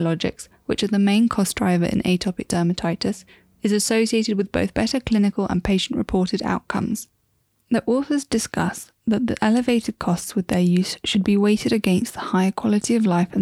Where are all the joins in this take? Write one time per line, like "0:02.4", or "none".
none